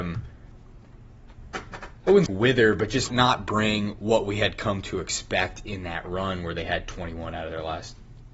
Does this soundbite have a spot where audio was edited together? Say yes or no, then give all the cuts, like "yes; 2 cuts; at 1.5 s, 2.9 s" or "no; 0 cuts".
yes; 2 cuts; at 2.3 s, 3.1 s